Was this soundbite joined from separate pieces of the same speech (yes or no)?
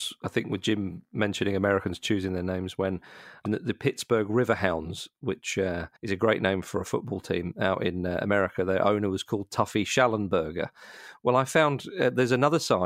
yes